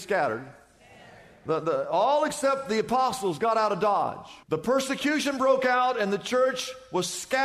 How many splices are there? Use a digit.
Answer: 1